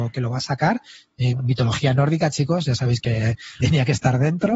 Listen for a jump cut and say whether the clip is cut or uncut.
cut